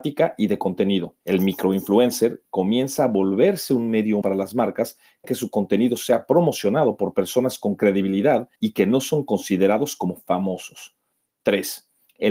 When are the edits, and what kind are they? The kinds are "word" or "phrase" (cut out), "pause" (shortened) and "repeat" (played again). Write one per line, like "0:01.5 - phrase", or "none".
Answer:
0:01.2 - pause
0:04.2 - phrase
0:05.2 - word
0:08.6 - pause